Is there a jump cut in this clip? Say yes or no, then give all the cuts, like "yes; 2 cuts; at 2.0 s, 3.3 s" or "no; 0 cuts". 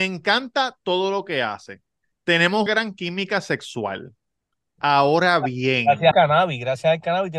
yes; 2 cuts; at 2.7 s, 6.1 s